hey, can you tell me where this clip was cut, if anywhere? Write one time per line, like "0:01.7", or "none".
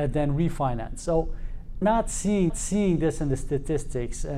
0:01.8
0:02.5